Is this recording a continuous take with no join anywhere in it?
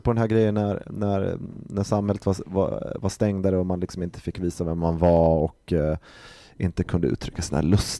yes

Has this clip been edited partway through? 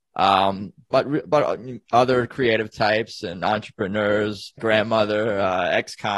yes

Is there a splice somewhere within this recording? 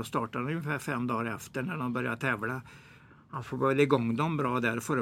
no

